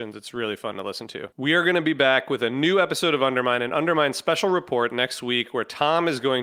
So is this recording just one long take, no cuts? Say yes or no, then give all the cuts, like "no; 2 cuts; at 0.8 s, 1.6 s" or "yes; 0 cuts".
no; 1 cut; at 1.3 s